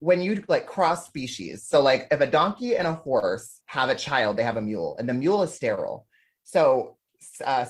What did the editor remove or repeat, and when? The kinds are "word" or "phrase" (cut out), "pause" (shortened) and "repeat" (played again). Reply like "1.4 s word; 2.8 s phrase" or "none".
none